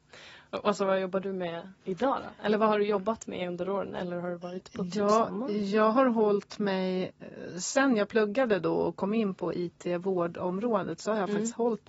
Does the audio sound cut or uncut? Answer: cut